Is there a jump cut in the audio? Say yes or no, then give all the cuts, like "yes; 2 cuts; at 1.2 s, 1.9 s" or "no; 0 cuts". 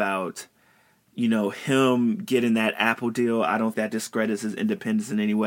yes; 1 cut; at 3.7 s